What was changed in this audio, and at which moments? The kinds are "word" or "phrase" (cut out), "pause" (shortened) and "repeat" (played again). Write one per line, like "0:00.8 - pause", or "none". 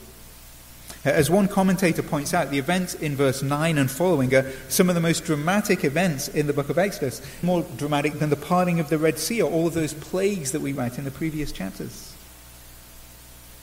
0:07.4 - word
0:10.8 - word

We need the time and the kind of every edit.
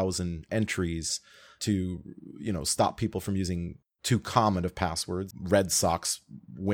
0:05.3 - word

